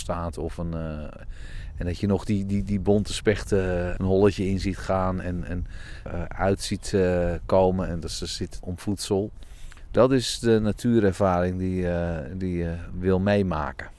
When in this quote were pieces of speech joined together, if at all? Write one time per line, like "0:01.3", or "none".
0:04.0
0:06.1
0:08.6

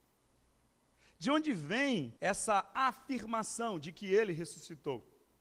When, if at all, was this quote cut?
0:02.2

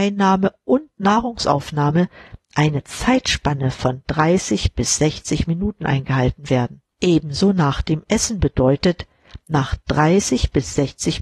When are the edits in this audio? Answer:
0:06.9

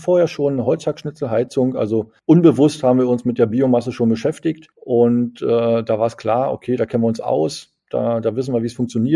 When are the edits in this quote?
0:02.2
0:04.7

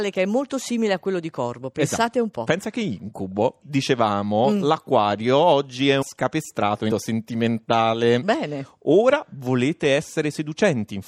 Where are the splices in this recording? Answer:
0:03.6
0:06.0
0:06.9

